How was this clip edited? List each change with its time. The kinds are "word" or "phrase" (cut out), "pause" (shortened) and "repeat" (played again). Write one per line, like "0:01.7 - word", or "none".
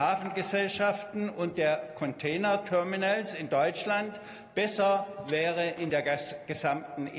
none